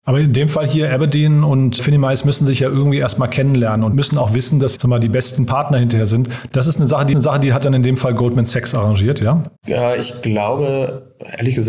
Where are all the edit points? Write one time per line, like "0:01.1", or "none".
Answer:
0:01.8
0:03.9
0:04.8
0:07.1
0:09.6